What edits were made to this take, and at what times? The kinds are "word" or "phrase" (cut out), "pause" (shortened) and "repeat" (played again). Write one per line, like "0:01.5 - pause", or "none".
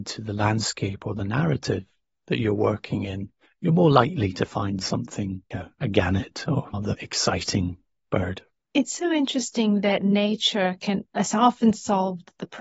0:05.5 - word
0:06.7 - word